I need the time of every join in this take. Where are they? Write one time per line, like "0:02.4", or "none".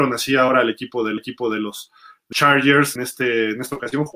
0:01.2
0:02.3
0:03.0